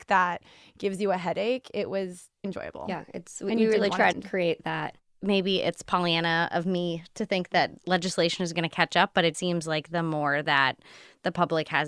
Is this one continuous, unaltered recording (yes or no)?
no